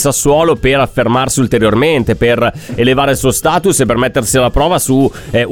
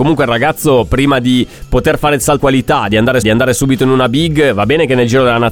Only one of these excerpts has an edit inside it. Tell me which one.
second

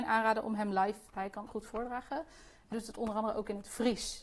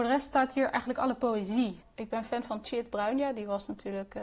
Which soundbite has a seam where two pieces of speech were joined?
first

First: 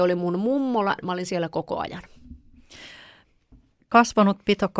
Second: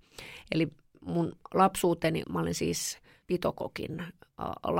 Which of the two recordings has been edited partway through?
second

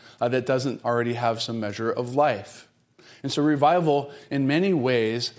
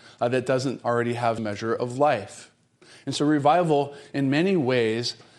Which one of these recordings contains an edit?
second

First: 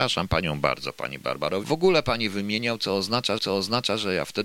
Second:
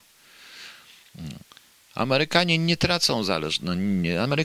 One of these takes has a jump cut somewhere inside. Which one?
first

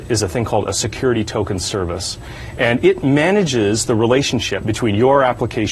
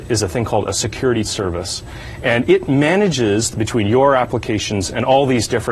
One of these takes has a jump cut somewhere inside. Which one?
second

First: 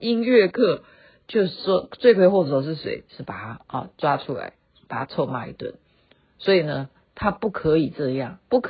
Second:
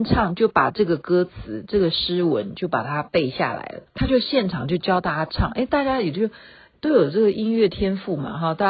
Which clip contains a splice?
second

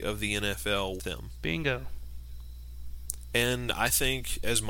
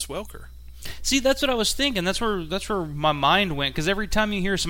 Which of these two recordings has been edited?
first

